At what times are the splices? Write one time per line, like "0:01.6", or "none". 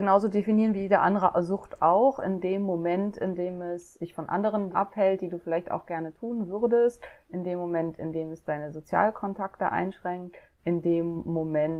0:04.0
0:04.7